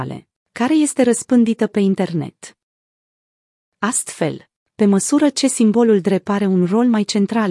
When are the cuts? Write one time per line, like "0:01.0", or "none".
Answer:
none